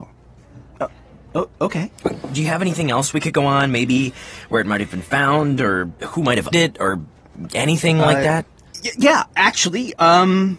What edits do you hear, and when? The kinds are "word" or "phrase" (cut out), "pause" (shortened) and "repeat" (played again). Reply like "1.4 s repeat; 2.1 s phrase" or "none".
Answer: 6.5 s word